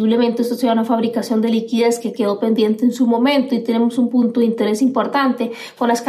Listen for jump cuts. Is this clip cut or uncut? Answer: uncut